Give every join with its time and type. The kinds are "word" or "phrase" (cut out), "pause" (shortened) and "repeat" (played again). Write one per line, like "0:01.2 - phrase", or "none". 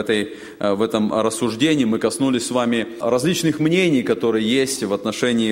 none